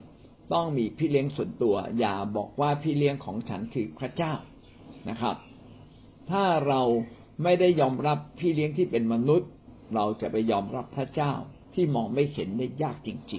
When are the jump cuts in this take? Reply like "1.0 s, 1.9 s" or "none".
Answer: 11.6 s